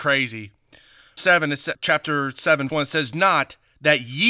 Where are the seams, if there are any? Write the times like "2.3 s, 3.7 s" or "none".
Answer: 1.2 s, 1.7 s, 2.7 s, 3.1 s